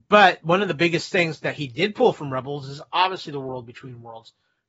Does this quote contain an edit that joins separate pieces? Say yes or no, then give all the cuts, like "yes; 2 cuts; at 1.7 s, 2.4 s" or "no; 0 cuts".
no; 0 cuts